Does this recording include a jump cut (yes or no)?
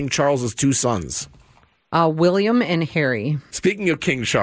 no